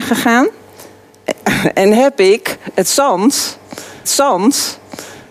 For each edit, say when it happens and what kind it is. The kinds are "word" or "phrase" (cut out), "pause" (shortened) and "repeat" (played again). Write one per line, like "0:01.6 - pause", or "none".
0:04.0 - repeat